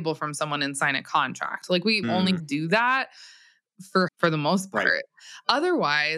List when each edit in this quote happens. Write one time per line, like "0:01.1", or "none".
0:02.0
0:02.4
0:04.1